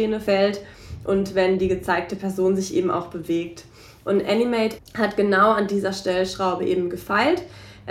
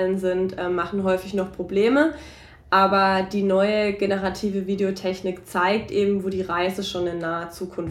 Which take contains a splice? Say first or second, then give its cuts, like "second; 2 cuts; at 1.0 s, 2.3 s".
first; 1 cut; at 4.8 s